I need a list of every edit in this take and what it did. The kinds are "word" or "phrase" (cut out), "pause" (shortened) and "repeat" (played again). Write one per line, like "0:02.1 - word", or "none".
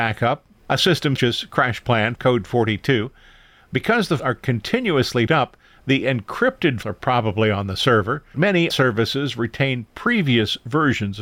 0:01.2 - word
0:02.1 - word
0:04.2 - word
0:05.3 - word
0:06.8 - word
0:08.3 - word
0:08.7 - word